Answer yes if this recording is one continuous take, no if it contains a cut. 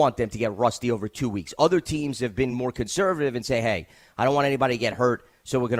yes